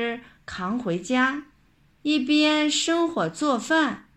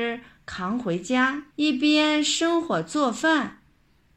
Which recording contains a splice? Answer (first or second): second